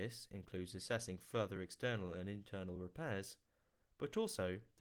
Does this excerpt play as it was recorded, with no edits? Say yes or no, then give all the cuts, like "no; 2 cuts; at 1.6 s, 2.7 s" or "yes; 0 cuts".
yes; 0 cuts